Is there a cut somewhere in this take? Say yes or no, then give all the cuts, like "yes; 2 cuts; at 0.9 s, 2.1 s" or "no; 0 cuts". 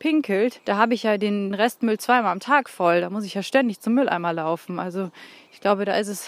no; 0 cuts